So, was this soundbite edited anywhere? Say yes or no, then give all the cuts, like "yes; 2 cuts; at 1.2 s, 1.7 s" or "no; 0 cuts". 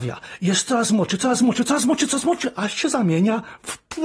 no; 0 cuts